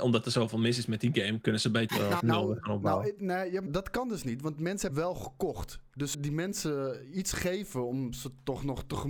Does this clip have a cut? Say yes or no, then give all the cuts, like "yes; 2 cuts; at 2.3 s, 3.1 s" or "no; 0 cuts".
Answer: yes; 5 cuts; at 1.9 s, 2.2 s, 3.7 s, 4.9 s, 6.1 s